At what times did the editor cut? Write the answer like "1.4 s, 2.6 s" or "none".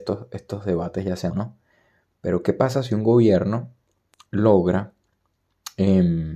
1.3 s